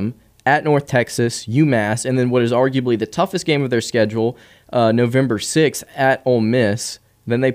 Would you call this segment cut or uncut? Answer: uncut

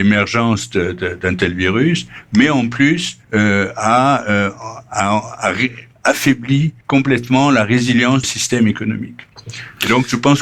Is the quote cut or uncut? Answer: cut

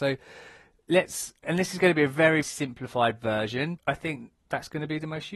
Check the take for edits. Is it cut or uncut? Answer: cut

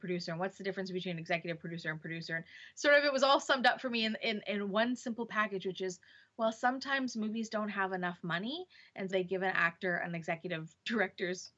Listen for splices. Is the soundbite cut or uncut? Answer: cut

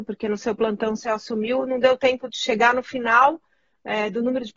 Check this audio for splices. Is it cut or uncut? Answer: uncut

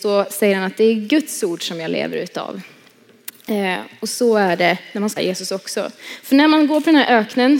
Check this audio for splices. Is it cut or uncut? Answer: cut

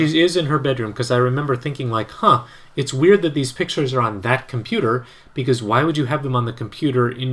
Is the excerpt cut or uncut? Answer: uncut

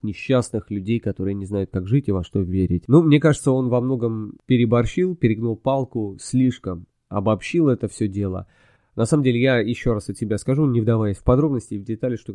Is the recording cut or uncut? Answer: uncut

